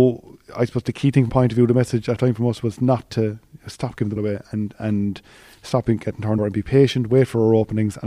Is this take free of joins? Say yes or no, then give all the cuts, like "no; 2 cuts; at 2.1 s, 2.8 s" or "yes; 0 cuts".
no; 4 cuts; at 1.3 s, 2.2 s, 4.2 s, 6.4 s